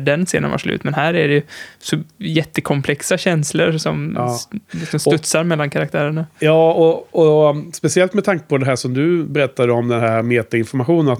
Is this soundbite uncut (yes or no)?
yes